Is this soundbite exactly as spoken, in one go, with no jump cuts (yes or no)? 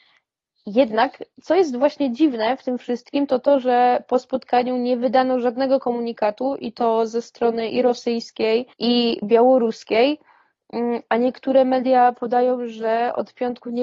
no